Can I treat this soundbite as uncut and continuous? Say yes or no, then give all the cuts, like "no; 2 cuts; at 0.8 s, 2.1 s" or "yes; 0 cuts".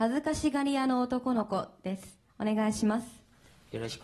no; 1 cut; at 2.3 s